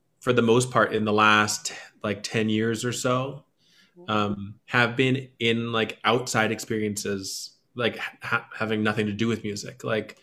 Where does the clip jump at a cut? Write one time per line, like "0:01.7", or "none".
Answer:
0:04.6